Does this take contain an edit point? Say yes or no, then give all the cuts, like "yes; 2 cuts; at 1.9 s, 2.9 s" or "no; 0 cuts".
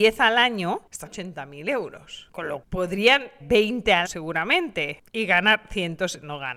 yes; 4 cuts; at 1.1 s, 2.6 s, 3.4 s, 4.0 s